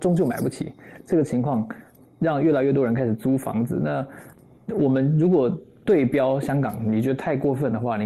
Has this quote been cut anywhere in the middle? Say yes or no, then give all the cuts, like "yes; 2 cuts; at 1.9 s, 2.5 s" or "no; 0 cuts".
no; 0 cuts